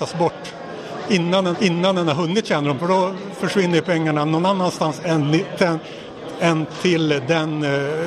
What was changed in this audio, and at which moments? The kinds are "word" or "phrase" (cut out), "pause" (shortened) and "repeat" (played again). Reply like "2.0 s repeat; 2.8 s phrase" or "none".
1.5 s repeat; 2.8 s word